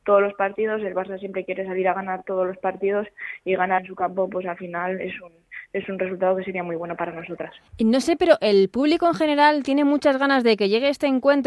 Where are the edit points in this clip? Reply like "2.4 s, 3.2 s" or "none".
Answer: 3.8 s, 7.7 s

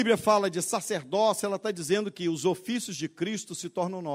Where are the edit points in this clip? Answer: none

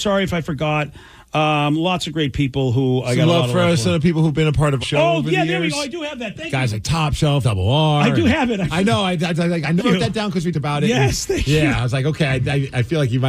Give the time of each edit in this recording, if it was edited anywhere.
4.8 s, 7.4 s, 9.8 s, 10.5 s

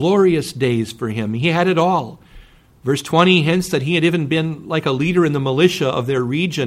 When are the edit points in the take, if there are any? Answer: none

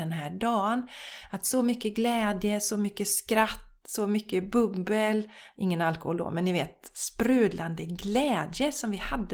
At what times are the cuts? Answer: none

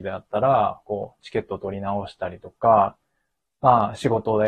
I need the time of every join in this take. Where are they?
none

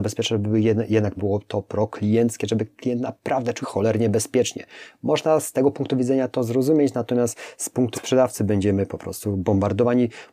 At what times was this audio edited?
1.2 s, 3.6 s, 7.9 s

